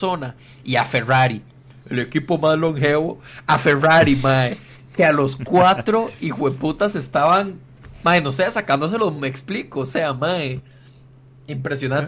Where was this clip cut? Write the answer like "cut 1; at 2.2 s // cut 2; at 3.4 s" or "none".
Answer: cut 1; at 9.2 s

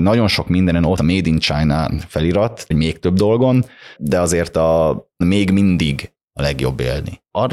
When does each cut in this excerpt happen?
cut 1; at 1.0 s // cut 2; at 2.7 s // cut 3; at 4.0 s // cut 4; at 5.2 s // cut 5; at 6.2 s

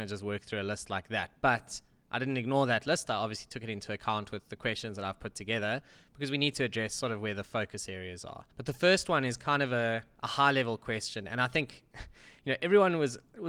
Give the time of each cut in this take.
cut 1; at 8.5 s

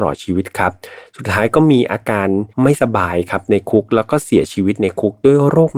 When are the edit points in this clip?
cut 1; at 2.5 s

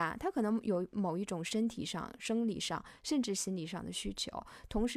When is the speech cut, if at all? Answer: none

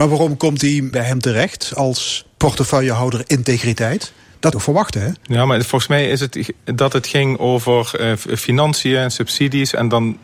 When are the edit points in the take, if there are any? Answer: cut 1; at 0.9 s // cut 2; at 4.5 s

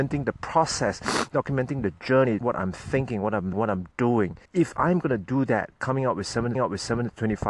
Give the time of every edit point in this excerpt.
cut 1; at 2.4 s // cut 2; at 3.5 s // cut 3; at 4.5 s // cut 4; at 5.8 s // cut 5; at 6.6 s

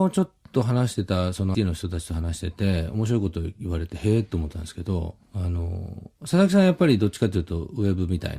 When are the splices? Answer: cut 1; at 1.5 s // cut 2; at 5.2 s

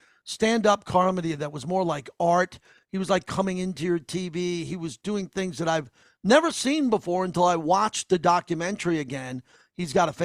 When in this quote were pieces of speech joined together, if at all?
none

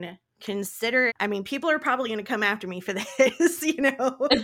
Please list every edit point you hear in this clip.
cut 1; at 1.1 s

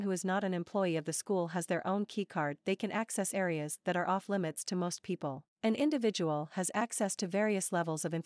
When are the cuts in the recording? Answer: cut 1; at 5.5 s

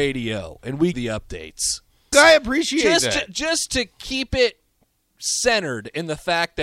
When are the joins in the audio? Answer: cut 1; at 0.9 s // cut 2; at 2.1 s

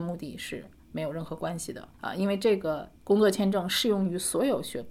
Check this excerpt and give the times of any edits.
cut 1; at 1.9 s // cut 2; at 3.0 s

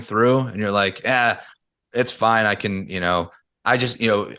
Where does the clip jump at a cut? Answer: none

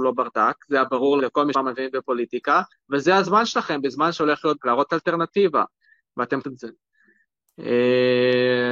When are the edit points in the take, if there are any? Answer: cut 1; at 1.2 s // cut 2; at 1.5 s // cut 3; at 2.7 s // cut 4; at 4.6 s // cut 5; at 6.4 s

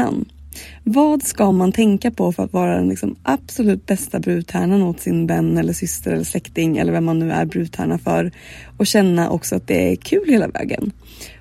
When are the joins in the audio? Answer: none

